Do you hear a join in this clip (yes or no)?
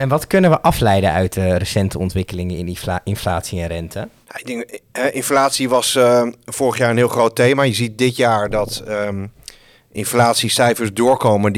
no